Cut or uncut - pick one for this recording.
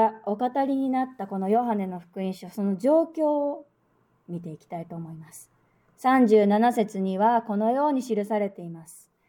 uncut